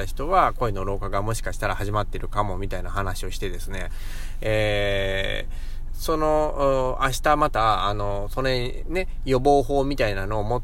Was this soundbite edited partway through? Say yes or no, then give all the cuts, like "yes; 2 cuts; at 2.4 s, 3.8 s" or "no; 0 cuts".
no; 0 cuts